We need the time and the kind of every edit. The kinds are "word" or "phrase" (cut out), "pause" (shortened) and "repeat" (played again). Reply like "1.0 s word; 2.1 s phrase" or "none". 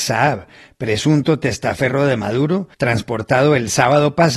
2.7 s pause

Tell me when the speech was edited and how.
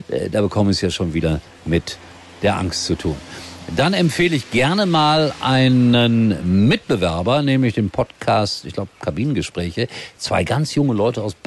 none

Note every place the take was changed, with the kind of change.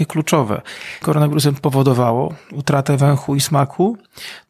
1.0 s phrase

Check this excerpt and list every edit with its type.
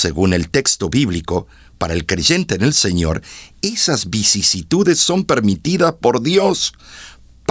none

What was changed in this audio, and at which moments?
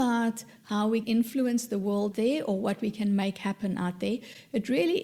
1.0 s word; 2.1 s word

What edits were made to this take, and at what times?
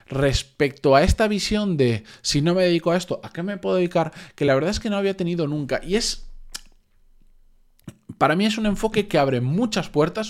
none

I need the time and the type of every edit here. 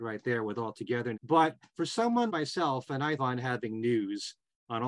1.1 s word; 2.3 s word; 3.2 s word

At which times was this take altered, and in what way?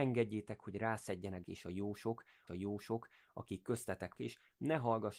1.4 s phrase; 2.5 s repeat; 4.2 s word

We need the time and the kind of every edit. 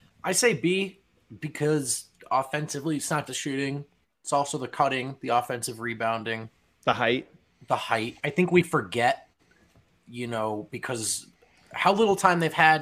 3.3 s word

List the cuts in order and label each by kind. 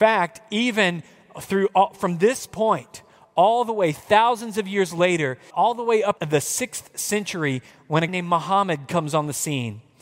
5.5 s word; 6.2 s word; 8.1 s word

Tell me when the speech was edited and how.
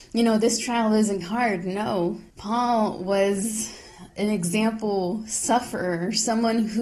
1.2 s phrase; 2.3 s pause; 4.1 s word

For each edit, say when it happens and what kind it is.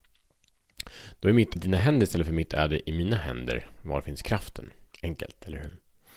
1.6 s word; 4.9 s pause

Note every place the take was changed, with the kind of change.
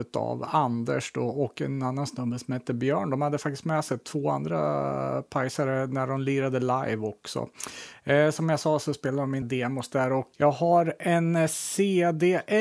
9.4 s word; 10.3 s word

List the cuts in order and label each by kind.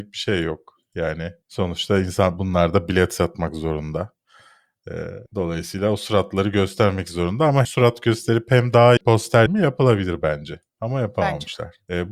1.4 s pause; 5.3 s pause; 7.6 s word; 9.0 s phrase; 9.5 s word; 10.7 s pause

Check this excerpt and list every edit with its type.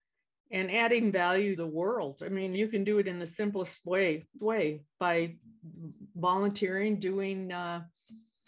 1.6 s word; 2.5 s word; 4.4 s word; 4.9 s word

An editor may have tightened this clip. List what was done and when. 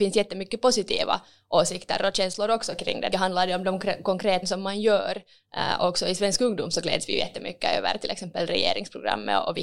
3.1 s phrase; 4.4 s word

